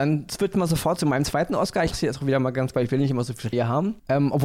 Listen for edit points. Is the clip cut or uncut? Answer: cut